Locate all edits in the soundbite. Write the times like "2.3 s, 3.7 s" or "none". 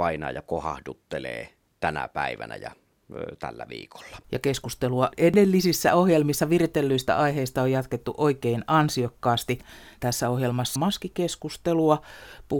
4.2 s, 10.8 s